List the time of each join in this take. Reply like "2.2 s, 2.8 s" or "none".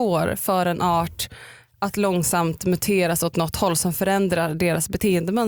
none

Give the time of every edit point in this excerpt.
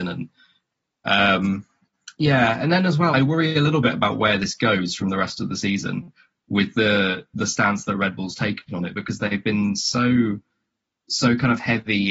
3.1 s

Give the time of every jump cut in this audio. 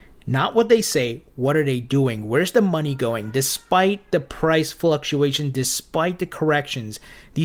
none

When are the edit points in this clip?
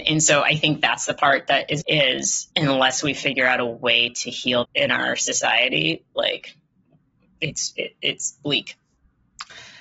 1.8 s, 2.5 s, 4.6 s

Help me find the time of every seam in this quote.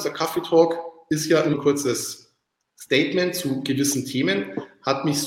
1.5 s, 2.5 s

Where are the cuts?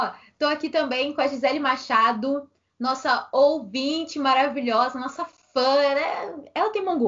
none

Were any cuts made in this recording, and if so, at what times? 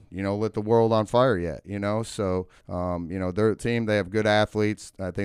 2.6 s, 3.6 s

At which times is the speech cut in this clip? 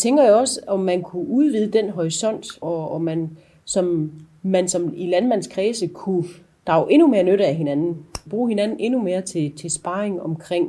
2.6 s, 8.3 s

